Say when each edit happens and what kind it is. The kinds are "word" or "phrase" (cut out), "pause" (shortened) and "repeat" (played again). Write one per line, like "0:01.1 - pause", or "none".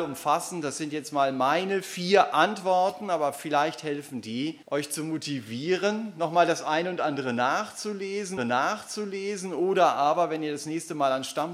0:04.6 - pause
0:08.4 - repeat